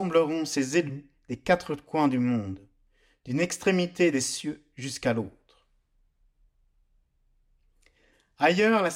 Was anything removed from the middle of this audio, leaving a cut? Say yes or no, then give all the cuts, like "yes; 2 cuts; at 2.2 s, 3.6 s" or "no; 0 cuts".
no; 0 cuts